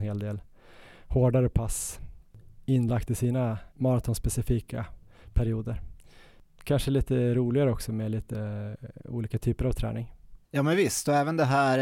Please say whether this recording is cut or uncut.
cut